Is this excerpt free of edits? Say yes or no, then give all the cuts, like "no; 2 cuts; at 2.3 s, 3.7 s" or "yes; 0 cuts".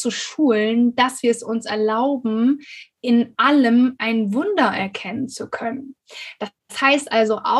no; 2 cuts; at 2.9 s, 6.6 s